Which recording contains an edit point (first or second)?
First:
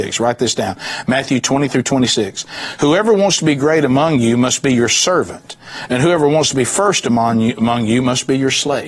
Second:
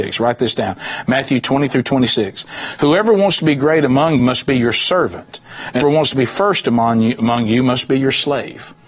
second